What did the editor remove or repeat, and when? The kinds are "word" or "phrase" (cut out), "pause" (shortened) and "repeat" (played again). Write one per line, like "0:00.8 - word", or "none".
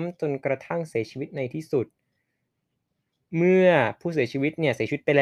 none